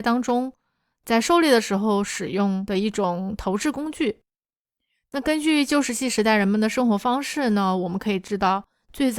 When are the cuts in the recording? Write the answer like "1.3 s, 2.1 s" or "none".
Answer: none

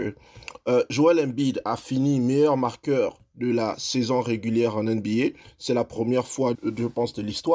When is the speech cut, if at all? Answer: 6.5 s

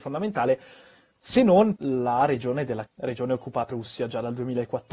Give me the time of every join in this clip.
1.8 s, 2.9 s, 3.7 s

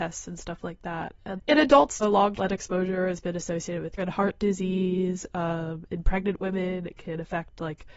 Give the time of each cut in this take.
1.4 s, 2.0 s, 2.3 s, 4.0 s

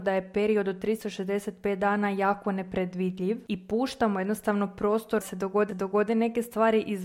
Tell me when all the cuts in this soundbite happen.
3.5 s, 5.2 s, 5.7 s

